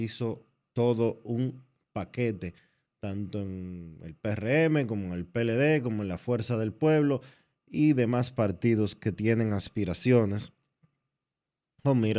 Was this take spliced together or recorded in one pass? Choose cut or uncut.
uncut